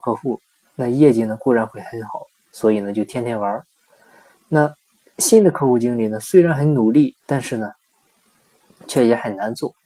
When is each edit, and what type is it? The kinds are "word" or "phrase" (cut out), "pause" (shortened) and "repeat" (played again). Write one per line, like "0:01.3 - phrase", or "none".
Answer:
0:07.2 - pause

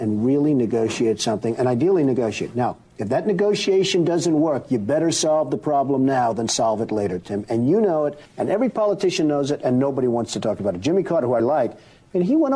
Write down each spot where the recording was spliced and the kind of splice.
0:08.3 - pause
0:11.4 - word

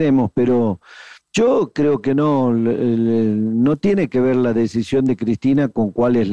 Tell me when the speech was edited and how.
0:01.2 - pause

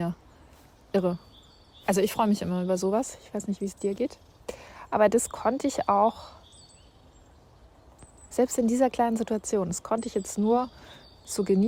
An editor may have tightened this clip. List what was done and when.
none

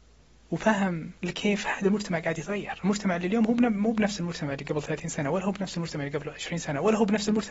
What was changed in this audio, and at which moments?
0:01.2 - pause

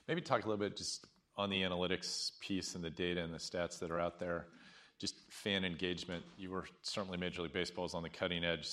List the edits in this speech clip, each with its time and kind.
none

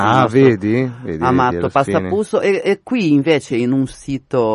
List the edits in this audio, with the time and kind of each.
none

